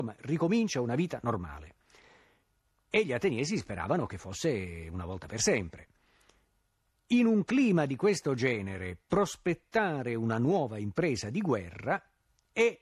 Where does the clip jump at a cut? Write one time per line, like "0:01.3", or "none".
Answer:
none